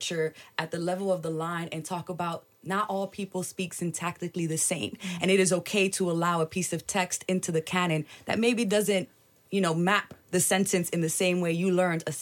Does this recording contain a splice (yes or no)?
no